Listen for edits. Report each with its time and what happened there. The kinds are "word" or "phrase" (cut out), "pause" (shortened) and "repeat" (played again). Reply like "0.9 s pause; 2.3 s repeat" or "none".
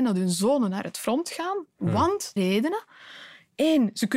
2.4 s word